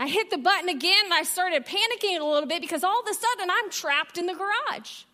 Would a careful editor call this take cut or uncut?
uncut